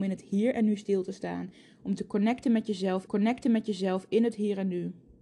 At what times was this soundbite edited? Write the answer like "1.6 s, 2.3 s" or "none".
3.1 s